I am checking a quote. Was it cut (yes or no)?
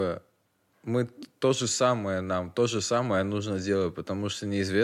no